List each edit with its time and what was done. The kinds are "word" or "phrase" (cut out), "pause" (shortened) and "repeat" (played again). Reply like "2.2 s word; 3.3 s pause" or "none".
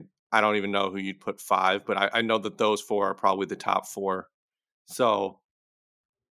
none